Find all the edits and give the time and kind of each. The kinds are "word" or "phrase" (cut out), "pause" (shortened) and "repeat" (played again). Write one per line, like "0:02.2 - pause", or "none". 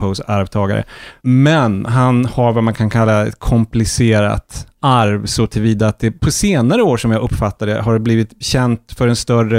0:01.2 - pause
0:06.2 - pause